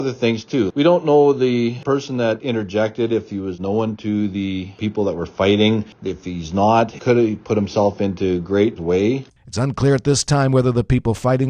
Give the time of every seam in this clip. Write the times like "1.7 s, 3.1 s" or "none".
8.8 s